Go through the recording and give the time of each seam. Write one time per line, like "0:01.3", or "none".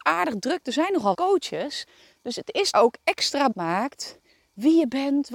0:01.1
0:02.7
0:03.5